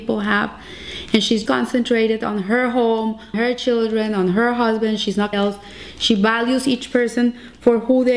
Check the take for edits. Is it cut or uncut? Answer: cut